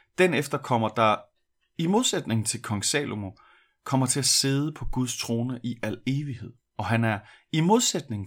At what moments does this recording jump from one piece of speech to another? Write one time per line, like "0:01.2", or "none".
0:06.6